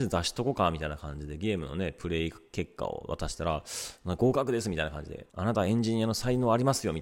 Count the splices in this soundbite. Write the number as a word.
one